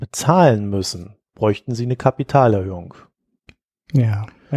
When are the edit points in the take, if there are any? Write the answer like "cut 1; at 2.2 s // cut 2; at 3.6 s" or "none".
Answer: none